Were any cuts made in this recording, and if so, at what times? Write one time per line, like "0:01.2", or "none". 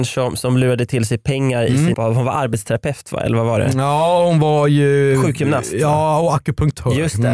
0:01.9